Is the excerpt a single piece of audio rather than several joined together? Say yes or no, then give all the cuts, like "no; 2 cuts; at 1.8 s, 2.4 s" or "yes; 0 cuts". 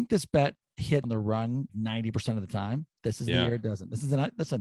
no; 2 cuts; at 1.0 s, 1.7 s